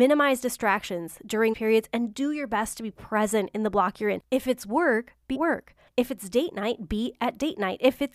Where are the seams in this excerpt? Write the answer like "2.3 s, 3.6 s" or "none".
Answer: 1.5 s, 5.3 s

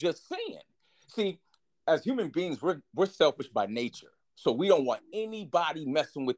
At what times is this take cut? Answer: none

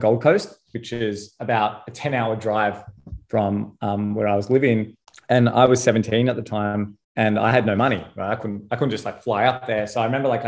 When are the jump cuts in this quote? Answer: 5.0 s, 7.0 s

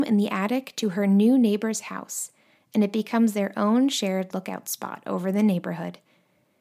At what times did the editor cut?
none

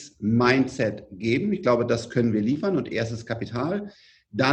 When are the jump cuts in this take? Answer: none

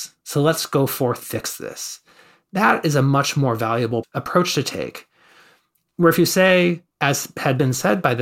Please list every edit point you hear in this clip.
1.2 s

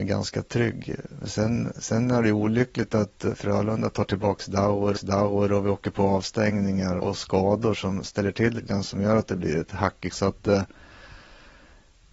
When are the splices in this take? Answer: 4.9 s, 7.0 s, 8.6 s, 10.1 s

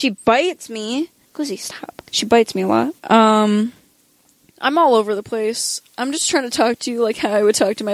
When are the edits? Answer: 1.2 s, 2.1 s, 3.0 s

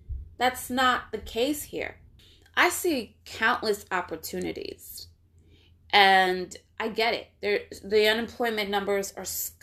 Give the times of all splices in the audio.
none

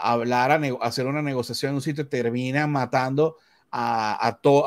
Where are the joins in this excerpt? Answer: none

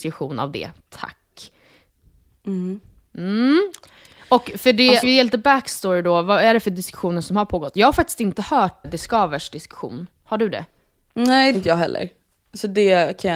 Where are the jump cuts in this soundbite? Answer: 5.0 s, 8.8 s, 11.5 s

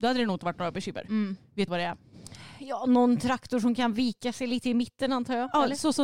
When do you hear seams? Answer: 1.7 s

